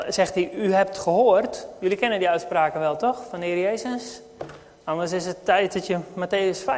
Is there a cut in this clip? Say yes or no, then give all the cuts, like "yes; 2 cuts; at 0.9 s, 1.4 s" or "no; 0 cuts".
no; 0 cuts